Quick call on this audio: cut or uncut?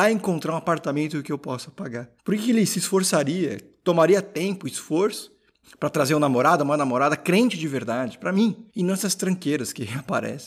cut